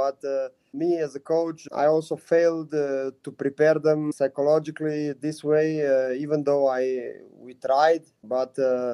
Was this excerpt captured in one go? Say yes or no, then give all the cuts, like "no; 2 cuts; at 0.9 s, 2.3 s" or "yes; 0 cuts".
yes; 0 cuts